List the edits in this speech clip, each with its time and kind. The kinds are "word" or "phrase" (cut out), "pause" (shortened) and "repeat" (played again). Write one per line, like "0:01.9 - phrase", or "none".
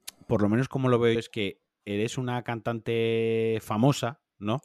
0:01.2 - word